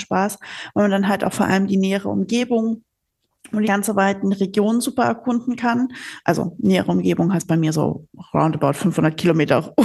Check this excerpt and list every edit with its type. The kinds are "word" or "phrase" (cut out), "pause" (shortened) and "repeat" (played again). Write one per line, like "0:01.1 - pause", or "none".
0:03.6 - word